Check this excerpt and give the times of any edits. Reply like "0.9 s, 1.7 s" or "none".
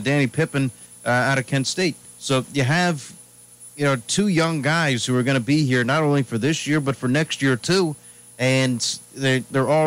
2.1 s

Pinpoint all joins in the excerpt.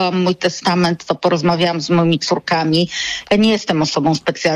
none

